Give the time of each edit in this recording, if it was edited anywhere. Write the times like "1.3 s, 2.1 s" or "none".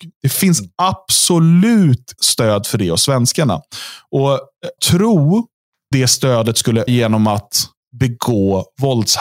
2.2 s, 4.8 s, 5.9 s, 6.9 s